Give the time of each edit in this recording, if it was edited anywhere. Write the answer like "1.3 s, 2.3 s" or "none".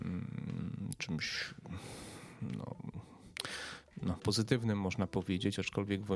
4.2 s